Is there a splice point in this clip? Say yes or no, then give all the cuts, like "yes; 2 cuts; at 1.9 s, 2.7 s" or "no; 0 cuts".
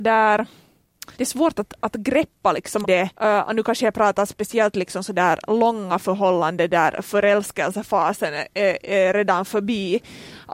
yes; 3 cuts; at 1.1 s, 2.8 s, 3.1 s